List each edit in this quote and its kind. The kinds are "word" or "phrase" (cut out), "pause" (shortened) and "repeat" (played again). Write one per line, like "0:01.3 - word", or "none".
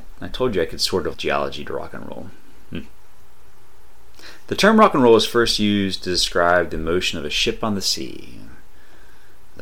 0:01.1 - word